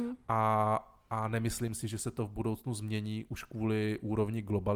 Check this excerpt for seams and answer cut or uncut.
uncut